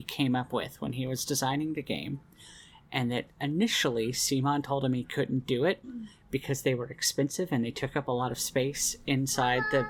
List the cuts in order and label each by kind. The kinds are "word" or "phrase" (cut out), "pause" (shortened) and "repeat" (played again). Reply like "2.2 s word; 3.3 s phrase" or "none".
none